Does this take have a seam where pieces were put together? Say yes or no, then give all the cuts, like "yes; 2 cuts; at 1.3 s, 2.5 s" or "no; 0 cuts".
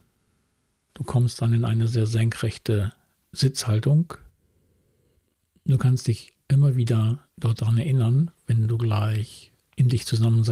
no; 0 cuts